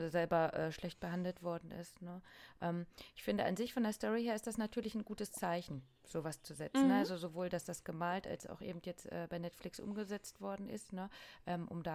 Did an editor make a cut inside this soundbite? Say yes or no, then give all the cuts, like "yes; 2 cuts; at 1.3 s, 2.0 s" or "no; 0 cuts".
no; 0 cuts